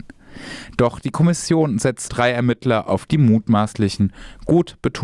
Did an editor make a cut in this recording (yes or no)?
yes